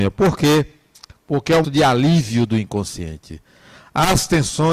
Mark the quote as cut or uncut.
cut